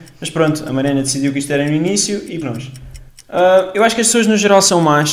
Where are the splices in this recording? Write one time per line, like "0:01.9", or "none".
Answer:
0:02.4
0:03.1